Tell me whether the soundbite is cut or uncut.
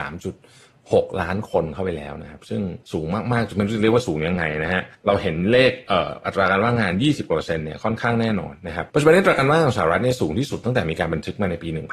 cut